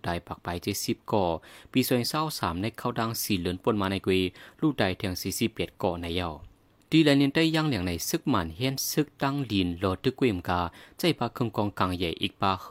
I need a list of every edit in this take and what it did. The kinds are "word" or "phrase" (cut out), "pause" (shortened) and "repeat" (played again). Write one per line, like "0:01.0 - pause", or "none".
none

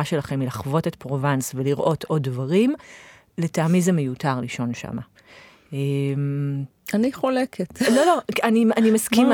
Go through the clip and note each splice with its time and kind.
none

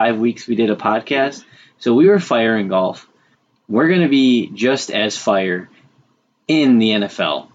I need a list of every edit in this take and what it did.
none

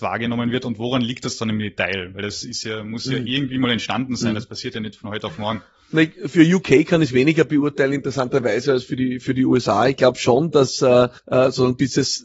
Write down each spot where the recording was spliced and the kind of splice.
0:11.2 - pause

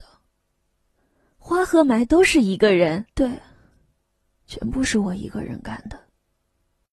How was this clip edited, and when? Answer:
0:03.1 - pause

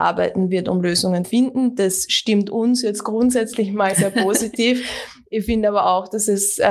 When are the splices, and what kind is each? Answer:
0:01.2 - word
0:03.9 - word

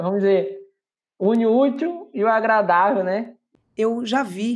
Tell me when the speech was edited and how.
none

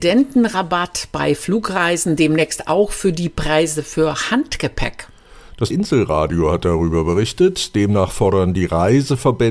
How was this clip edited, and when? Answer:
0:05.7 - word

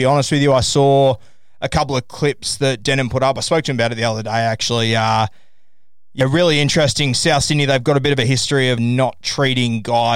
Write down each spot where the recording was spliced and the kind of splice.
0:08.8 - word

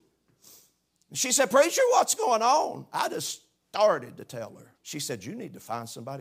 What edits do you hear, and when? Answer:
0:04.8 - pause

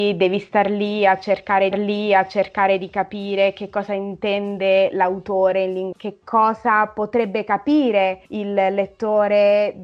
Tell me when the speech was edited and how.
0:01.7 - repeat
0:05.9 - word
0:08.3 - pause

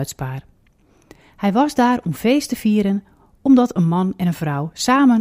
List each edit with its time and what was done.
none

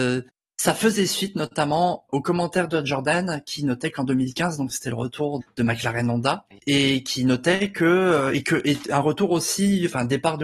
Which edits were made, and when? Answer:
0:02.1 - word
0:05.4 - word
0:06.5 - word

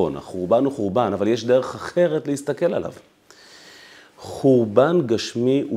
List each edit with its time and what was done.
none

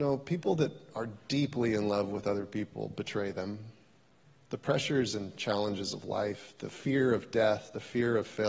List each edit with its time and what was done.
none

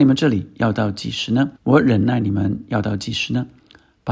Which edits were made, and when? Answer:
0:01.6 - pause

